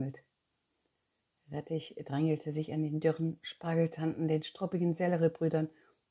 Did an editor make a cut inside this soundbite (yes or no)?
no